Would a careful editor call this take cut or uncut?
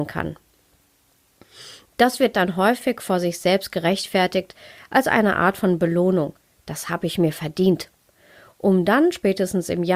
uncut